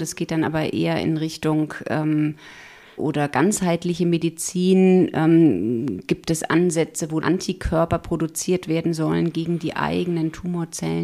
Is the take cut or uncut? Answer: cut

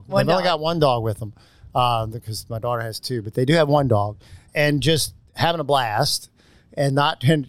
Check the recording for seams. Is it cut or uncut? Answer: uncut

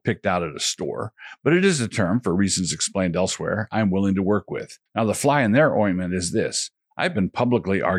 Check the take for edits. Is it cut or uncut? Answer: cut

